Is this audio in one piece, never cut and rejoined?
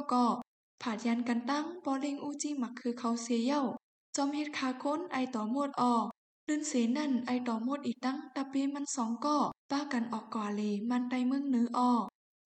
no; 1 cut; at 9.6 s

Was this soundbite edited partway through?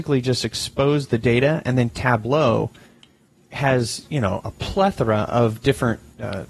no; 0 cuts

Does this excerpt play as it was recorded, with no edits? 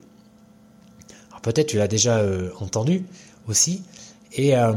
yes; 0 cuts

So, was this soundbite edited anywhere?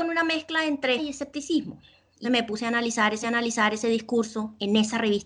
yes; 3 cuts; at 1.0 s, 2.2 s, 3.2 s

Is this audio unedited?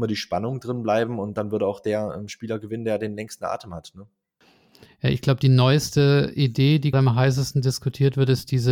no; 1 cut; at 6.9 s

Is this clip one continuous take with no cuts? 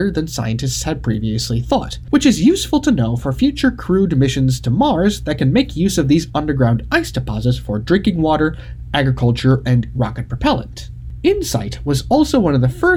no; 1 cut; at 9.9 s

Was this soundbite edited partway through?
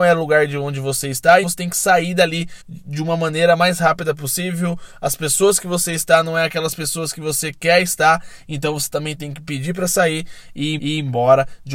yes; 3 cuts; at 1.4 s, 2.6 s, 10.8 s

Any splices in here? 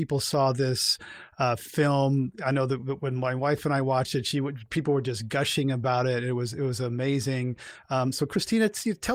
no; 0 cuts

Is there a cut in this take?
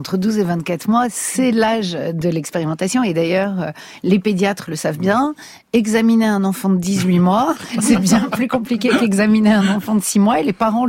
no; 0 cuts

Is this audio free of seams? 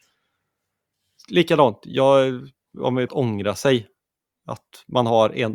no; 1 cut; at 3.1 s

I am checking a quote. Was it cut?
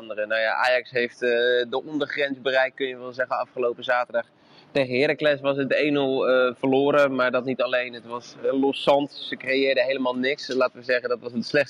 no; 0 cuts

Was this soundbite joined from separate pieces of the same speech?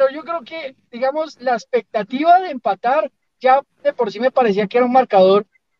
no; 0 cuts

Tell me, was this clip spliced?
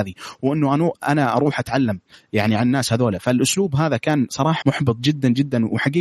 yes; 1 cut; at 4.6 s

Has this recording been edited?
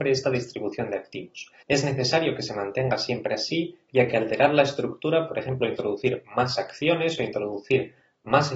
yes; 1 cut; at 1.6 s

